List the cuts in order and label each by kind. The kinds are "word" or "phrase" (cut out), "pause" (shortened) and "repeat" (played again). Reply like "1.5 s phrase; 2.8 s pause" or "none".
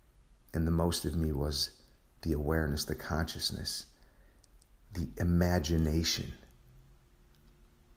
none